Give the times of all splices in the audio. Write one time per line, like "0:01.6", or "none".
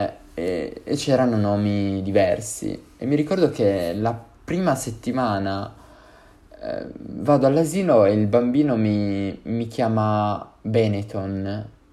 none